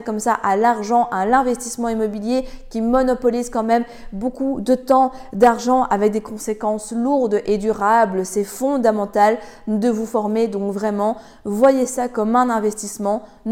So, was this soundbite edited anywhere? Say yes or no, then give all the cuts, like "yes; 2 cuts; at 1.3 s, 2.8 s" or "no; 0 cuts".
no; 0 cuts